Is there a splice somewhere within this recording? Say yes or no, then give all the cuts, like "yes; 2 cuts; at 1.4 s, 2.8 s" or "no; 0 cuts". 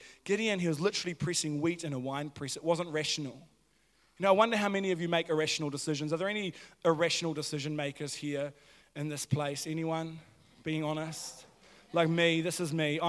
no; 0 cuts